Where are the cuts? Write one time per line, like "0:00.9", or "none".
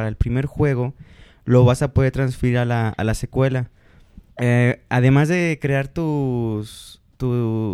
0:04.3